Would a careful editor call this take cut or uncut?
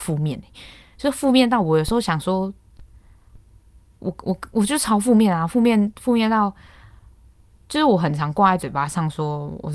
uncut